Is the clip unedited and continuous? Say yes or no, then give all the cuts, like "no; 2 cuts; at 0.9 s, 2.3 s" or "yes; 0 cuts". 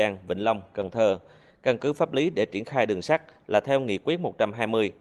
yes; 0 cuts